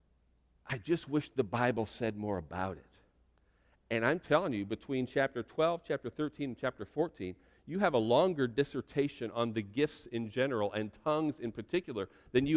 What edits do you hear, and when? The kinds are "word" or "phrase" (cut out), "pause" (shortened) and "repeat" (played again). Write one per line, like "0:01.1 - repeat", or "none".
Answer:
none